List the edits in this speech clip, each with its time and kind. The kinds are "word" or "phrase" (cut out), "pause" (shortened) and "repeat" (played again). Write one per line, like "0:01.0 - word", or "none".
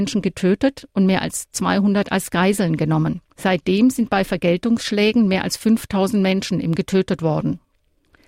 0:03.3 - pause
0:06.8 - word